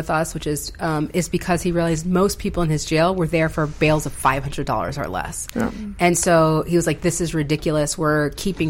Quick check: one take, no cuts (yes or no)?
yes